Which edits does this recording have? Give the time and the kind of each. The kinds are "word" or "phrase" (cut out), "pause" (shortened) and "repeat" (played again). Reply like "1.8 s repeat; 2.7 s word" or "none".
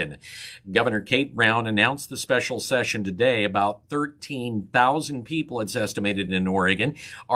none